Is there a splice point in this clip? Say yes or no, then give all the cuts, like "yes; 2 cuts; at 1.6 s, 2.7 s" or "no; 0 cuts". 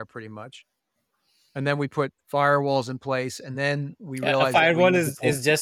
no; 0 cuts